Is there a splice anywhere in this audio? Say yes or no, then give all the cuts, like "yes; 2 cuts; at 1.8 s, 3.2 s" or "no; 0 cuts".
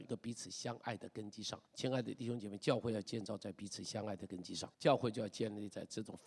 yes; 2 cuts; at 1.7 s, 4.7 s